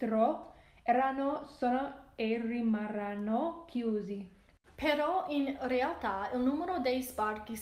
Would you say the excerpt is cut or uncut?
uncut